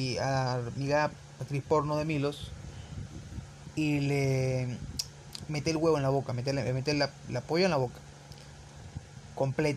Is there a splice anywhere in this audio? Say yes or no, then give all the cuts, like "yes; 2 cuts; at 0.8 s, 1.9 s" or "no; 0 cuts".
no; 0 cuts